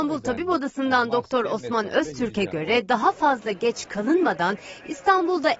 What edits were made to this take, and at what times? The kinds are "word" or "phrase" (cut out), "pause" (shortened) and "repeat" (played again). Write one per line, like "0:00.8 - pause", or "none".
none